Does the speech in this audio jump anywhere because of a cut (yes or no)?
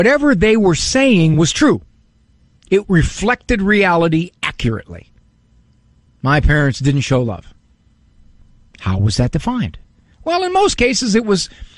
no